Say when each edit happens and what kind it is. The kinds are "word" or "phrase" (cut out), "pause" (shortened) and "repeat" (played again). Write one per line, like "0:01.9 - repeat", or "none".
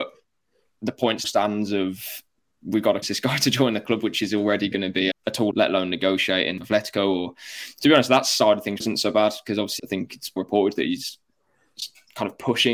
0:01.2 - word
0:03.0 - word
0:05.1 - word
0:05.5 - word
0:06.6 - word
0:08.8 - word
0:09.8 - word
0:10.4 - word